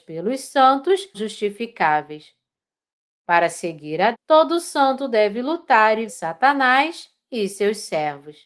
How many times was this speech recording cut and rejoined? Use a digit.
3